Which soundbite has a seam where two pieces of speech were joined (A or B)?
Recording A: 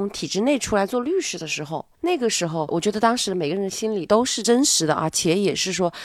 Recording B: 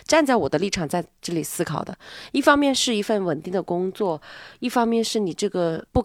A